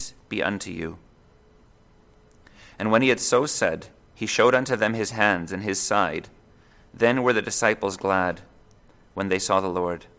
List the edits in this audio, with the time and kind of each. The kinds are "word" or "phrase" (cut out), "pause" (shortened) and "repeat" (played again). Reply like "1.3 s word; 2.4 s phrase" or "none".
none